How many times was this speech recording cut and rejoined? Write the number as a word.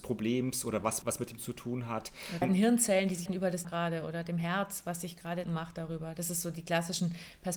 six